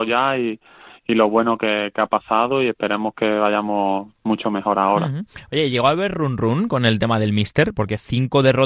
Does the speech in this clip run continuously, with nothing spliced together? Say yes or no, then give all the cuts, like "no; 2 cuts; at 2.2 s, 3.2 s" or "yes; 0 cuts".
yes; 0 cuts